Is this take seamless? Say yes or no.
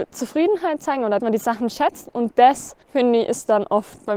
no